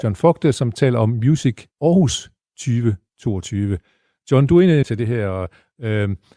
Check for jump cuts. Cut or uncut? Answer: cut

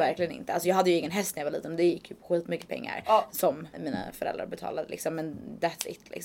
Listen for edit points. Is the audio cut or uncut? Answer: cut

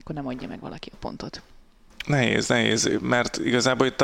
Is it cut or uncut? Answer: uncut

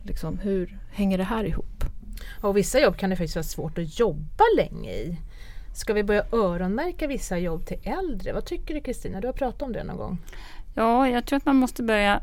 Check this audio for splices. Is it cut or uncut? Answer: uncut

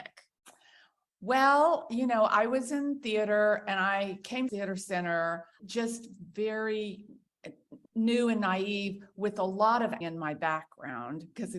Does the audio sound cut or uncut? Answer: cut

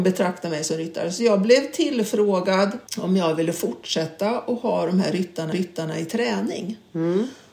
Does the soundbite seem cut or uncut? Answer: cut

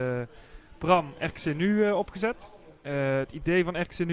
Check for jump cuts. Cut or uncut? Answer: uncut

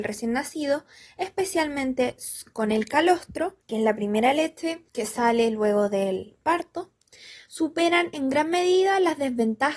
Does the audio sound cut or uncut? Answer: cut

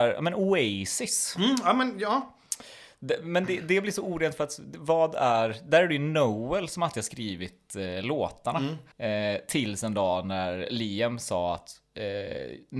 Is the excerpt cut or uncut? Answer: cut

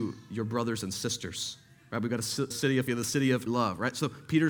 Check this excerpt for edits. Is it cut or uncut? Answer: cut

